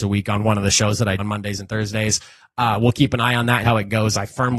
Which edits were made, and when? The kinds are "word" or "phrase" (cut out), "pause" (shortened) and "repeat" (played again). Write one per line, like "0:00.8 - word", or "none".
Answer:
0:01.2 - word
0:03.6 - word